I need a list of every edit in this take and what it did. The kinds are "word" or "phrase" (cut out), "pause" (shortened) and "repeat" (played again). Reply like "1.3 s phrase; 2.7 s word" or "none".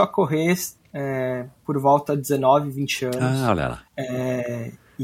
3.9 s pause